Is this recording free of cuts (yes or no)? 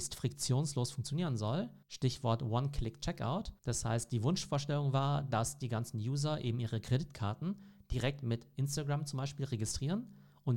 no